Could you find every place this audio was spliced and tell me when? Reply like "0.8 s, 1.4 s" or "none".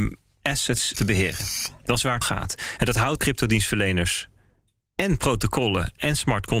0.9 s, 2.2 s, 3.2 s